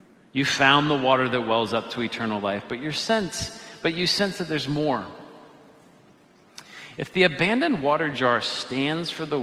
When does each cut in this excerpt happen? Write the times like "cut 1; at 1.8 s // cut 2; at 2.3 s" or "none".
none